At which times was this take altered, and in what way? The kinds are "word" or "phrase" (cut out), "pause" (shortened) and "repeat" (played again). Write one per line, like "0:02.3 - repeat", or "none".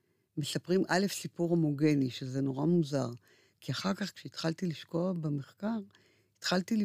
none